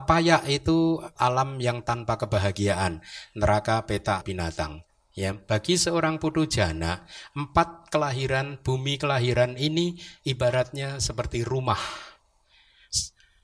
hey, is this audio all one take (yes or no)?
no